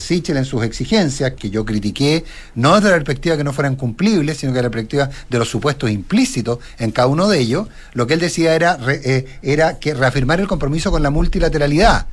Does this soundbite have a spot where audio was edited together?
yes; 1 cut; at 1.3 s

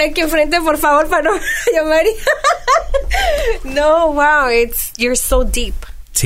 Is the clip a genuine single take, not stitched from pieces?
yes; 0 cuts

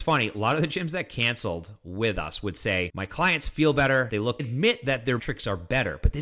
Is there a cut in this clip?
yes; 2 cuts; at 4.4 s, 5.2 s

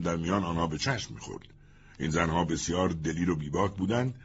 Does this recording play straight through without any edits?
yes; 0 cuts

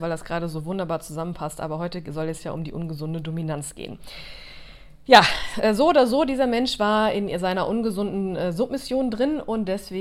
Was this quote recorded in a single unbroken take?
yes; 0 cuts

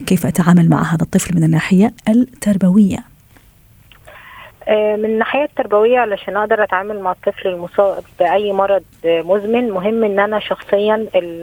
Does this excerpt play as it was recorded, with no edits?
no; 1 cut; at 2.0 s

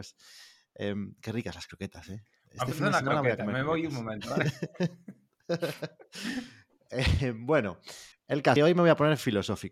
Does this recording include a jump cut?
yes; 2 cuts; at 8.1 s, 8.6 s

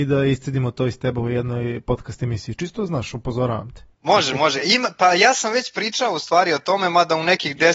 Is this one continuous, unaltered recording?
no; 1 cut; at 3.9 s

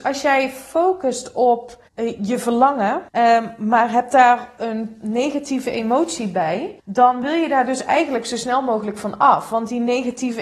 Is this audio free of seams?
no; 3 cuts; at 1.9 s, 3.1 s, 6.8 s

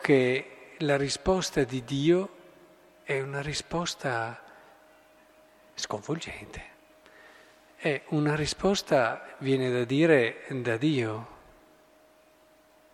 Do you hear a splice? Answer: no; 0 cuts

